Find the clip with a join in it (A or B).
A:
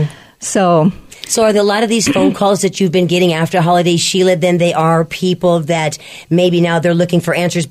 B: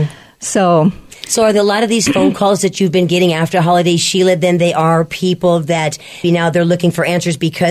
B